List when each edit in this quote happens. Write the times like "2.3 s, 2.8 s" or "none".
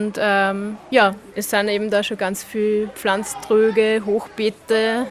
none